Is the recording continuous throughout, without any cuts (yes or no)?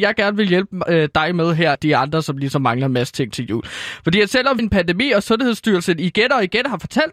no